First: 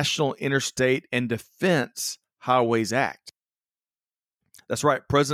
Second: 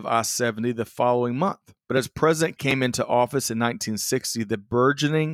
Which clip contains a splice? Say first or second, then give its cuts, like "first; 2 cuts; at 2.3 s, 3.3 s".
second; 2 cuts; at 1.8 s, 2.6 s